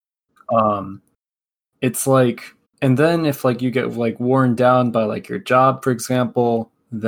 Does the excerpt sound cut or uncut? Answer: cut